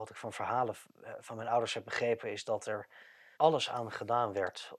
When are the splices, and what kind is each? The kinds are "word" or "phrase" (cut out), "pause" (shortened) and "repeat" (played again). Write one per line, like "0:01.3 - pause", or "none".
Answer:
0:03.3 - pause